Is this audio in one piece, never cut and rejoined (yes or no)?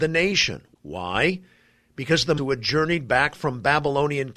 no